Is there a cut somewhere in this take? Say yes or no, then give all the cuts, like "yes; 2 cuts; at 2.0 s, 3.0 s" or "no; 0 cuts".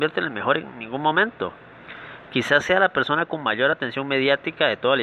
no; 0 cuts